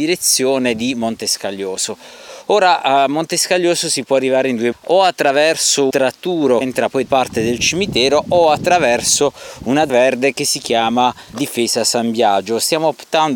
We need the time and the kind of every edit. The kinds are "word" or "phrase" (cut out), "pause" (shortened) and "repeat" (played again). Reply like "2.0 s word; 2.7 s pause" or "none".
4.7 s word; 5.9 s word; 6.6 s word; 7.0 s word; 9.9 s word; 11.3 s word